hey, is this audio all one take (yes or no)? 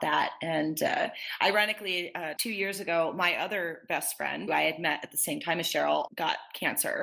no